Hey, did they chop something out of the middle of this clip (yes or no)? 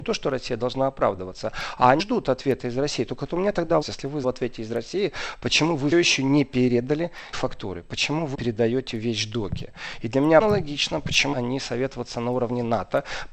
yes